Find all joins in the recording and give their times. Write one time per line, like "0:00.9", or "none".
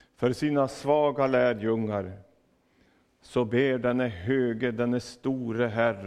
none